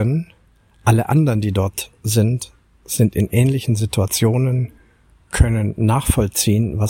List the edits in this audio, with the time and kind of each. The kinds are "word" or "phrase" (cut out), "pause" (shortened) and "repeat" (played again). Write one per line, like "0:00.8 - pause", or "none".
none

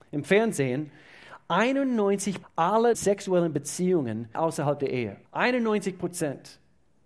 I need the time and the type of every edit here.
0:02.4 - word
0:02.9 - word
0:04.4 - word
0:05.3 - pause

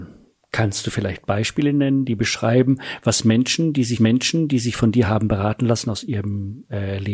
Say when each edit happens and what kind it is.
0:04.0 - repeat

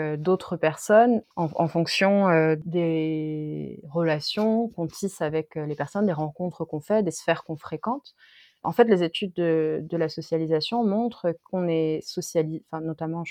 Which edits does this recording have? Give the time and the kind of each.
0:01.3 - pause

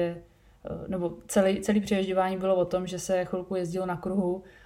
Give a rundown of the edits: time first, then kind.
none

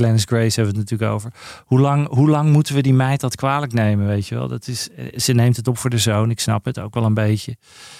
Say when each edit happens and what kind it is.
none

